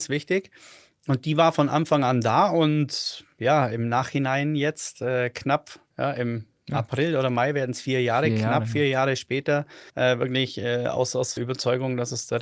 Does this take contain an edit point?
yes; 3 cuts; at 5.9 s, 9.9 s, 11.4 s

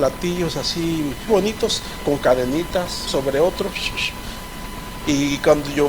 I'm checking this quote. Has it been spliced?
yes; 2 cuts; at 1.3 s, 3.1 s

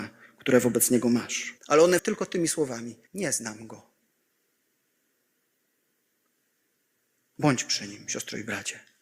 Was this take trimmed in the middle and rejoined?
yes; 3 cuts; at 1.6 s, 2.0 s, 3.1 s

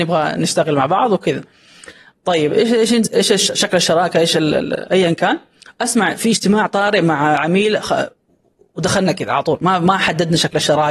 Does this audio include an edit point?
no; 0 cuts

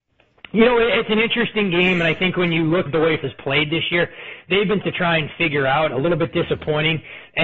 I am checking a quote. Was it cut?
yes; 3 cuts; at 2.9 s, 3.2 s, 4.8 s

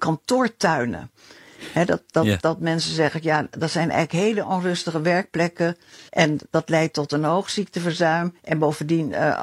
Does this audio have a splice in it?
yes; 2 cuts; at 6.1 s, 8.4 s

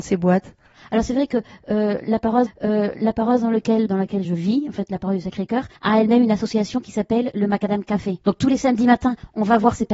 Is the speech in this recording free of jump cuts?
no; 5 cuts; at 2.5 s, 3.9 s, 4.2 s, 5.8 s, 8.2 s

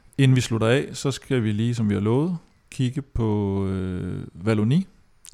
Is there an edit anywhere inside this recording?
no; 0 cuts

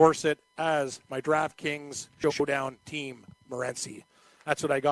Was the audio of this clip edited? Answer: no; 0 cuts

